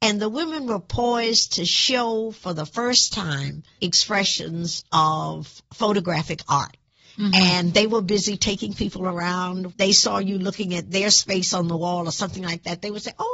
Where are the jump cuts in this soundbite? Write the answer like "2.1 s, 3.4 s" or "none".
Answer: 3.8 s, 9.7 s